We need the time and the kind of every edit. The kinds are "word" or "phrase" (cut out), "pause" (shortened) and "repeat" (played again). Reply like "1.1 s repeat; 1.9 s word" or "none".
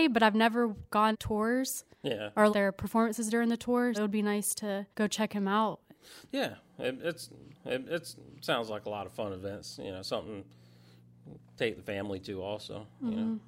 1.1 s phrase; 2.5 s word; 3.9 s word; 4.9 s pause; 7.5 s repeat